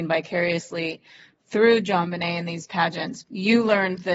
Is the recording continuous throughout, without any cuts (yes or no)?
no